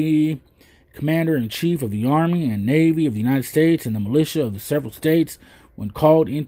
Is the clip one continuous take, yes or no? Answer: yes